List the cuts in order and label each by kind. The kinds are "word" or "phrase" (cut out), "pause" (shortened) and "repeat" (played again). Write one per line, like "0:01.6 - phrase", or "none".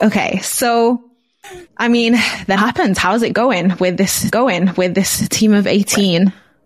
0:01.7 - pause
0:02.6 - word
0:04.3 - repeat